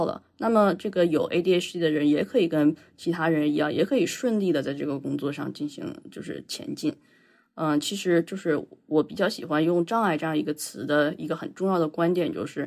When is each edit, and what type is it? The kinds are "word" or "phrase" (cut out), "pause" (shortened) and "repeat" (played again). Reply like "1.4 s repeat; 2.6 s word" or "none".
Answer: none